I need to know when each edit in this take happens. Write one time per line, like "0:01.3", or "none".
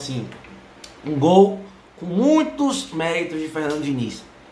none